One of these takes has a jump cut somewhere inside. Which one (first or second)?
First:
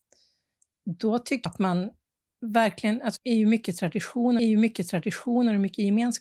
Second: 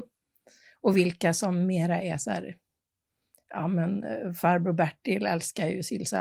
first